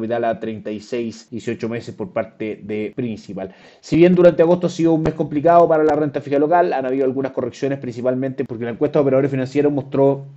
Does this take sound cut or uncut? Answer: uncut